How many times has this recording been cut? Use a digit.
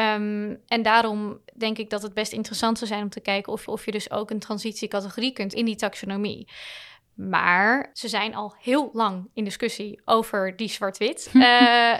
3